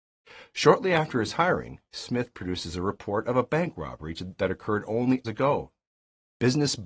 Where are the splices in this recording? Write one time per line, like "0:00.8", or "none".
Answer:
0:05.2